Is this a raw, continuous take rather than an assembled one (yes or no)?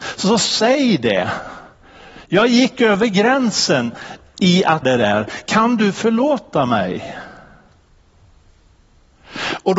no